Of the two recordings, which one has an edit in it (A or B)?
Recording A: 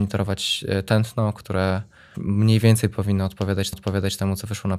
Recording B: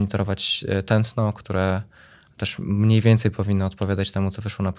A